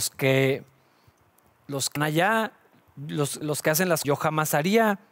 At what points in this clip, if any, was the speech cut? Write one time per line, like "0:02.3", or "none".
0:02.0
0:03.4
0:04.0